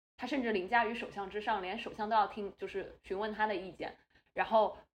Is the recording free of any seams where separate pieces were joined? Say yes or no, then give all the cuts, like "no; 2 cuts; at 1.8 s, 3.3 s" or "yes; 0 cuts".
yes; 0 cuts